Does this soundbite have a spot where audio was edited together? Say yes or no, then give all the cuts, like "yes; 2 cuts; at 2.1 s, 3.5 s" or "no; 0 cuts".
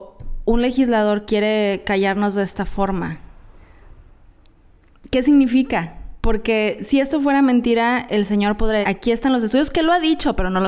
yes; 3 cuts; at 1.3 s, 6.2 s, 8.8 s